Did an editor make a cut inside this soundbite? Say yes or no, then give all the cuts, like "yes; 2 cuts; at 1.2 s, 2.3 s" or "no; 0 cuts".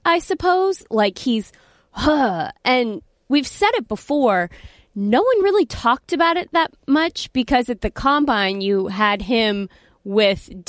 no; 0 cuts